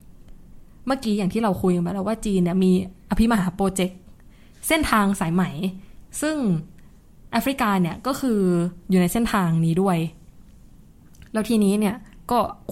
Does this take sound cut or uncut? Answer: uncut